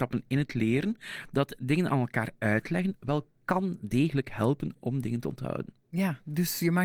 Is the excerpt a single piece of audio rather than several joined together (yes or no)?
yes